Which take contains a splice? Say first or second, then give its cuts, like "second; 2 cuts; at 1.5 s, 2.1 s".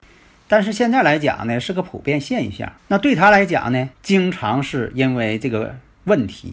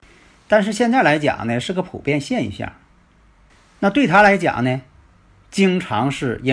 first; 2 cuts; at 2.8 s, 3.9 s